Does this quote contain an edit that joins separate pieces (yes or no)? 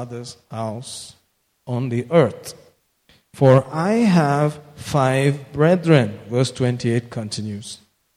no